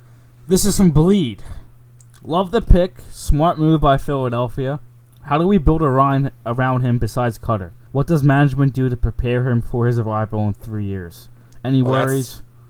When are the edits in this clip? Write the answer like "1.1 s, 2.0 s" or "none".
7.9 s